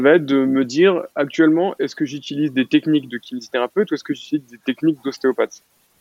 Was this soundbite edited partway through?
no; 0 cuts

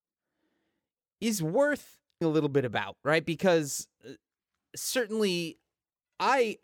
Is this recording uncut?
no; 1 cut; at 2.2 s

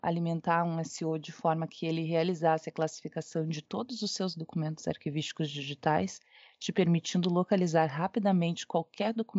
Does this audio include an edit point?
no; 0 cuts

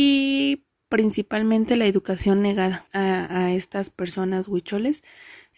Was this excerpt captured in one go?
no; 1 cut; at 2.9 s

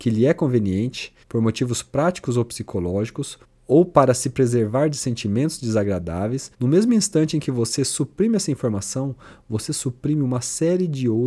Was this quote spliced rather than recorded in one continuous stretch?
yes; 3 cuts; at 1.2 s, 3.4 s, 6.5 s

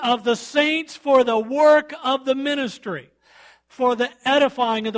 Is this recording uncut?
yes; 0 cuts

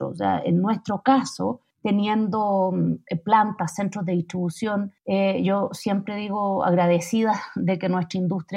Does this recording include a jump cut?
yes; 2 cuts; at 1.7 s, 5.0 s

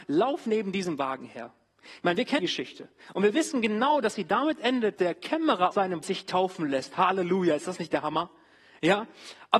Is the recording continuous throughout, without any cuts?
no; 4 cuts; at 2.4 s, 5.0 s, 5.7 s, 6.0 s

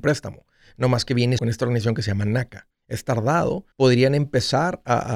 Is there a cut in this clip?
yes; 3 cuts; at 1.4 s, 2.7 s, 3.7 s

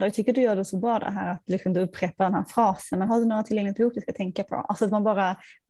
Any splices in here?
no; 0 cuts

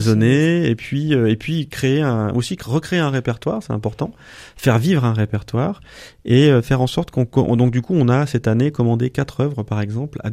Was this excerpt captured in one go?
yes; 0 cuts

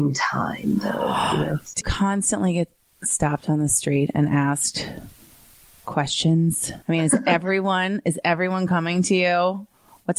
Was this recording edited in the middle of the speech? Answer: yes; 2 cuts; at 1.8 s, 6.8 s

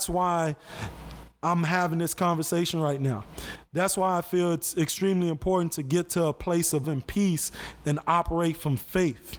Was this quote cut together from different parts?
yes; 1 cut; at 6.8 s

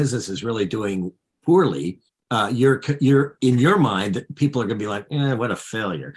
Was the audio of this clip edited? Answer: yes; 1 cut; at 2.1 s

